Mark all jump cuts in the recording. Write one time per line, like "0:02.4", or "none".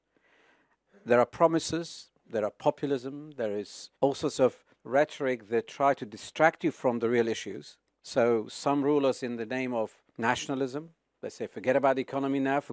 0:04.0
0:04.7
0:07.9
0:10.1

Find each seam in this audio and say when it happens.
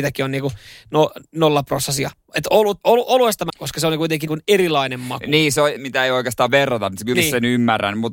0:02.8
0:03.5
0:04.3
0:05.8
0:06.5
0:07.1

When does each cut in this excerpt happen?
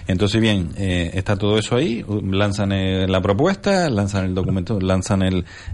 none

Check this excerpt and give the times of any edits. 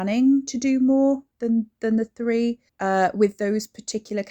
0:01.3
0:02.7

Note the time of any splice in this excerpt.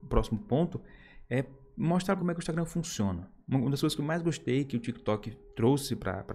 0:02.2

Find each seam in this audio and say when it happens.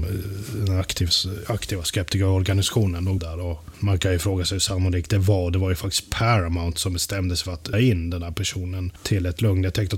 0:03.2
0:07.7

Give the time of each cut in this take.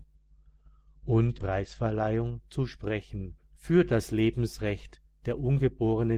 0:01.4
0:03.4

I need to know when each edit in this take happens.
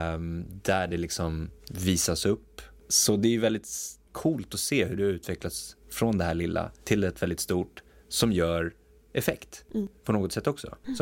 0:01.6
0:04.1
0:05.8
0:06.8

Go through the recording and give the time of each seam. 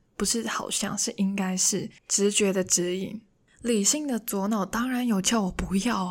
0:02.0

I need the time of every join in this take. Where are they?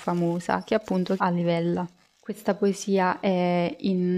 0:01.2
0:02.1

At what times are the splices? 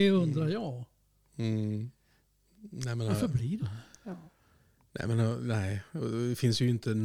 0:03.6

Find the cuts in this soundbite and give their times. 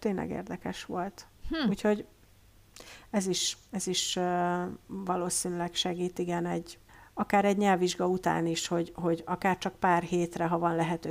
0:01.4
0:06.9

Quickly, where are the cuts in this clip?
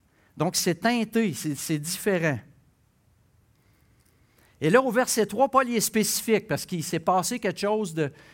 none

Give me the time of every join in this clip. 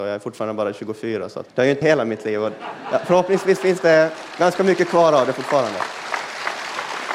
0:01.5
0:01.8

